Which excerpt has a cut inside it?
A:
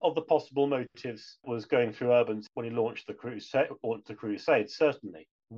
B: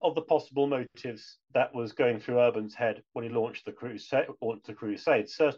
A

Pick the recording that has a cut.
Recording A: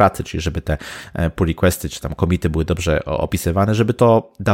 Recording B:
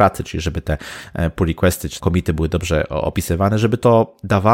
B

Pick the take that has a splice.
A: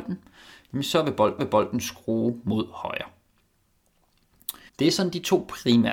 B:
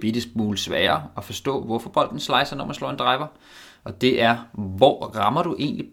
A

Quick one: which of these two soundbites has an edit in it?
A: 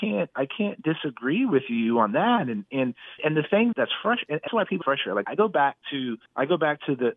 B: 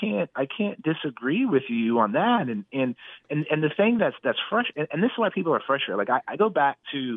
A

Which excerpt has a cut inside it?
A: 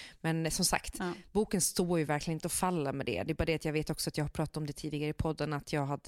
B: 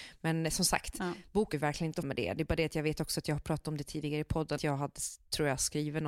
B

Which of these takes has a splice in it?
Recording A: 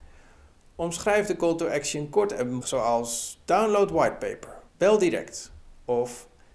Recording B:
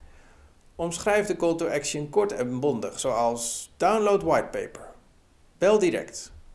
A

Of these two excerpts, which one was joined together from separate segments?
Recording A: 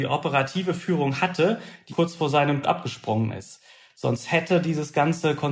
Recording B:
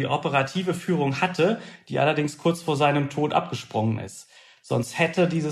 A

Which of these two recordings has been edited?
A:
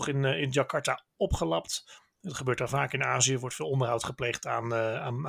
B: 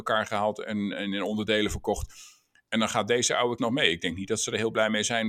B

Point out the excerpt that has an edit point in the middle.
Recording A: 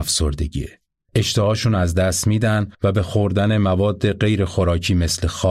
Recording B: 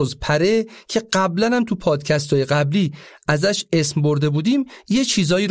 A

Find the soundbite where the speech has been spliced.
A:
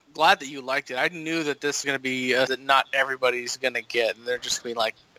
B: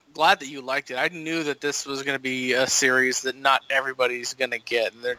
A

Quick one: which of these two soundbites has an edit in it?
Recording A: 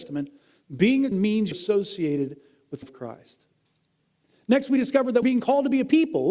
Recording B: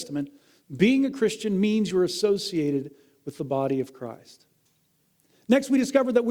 A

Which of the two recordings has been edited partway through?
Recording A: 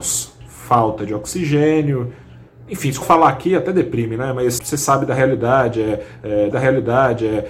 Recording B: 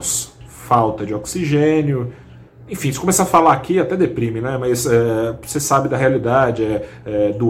A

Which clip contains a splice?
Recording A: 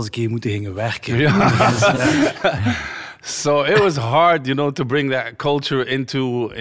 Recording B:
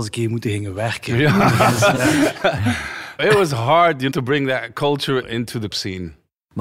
B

